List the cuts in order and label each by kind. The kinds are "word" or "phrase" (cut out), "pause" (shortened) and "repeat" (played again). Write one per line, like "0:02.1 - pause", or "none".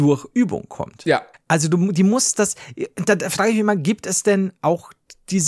0:01.3 - pause